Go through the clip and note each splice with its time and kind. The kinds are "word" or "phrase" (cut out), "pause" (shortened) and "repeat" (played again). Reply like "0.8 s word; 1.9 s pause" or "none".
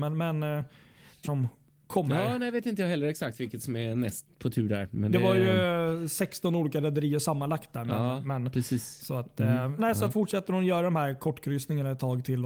1.2 s phrase; 9.8 s word; 10.1 s word